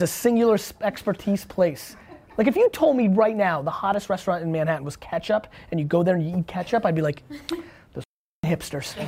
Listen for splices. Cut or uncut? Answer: uncut